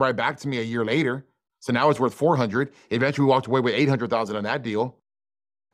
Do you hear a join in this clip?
no; 0 cuts

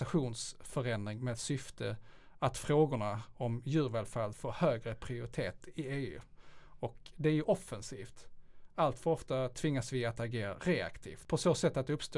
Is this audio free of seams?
no; 1 cut; at 4.3 s

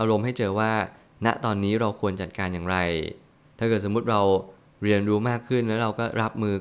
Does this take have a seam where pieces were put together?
no; 0 cuts

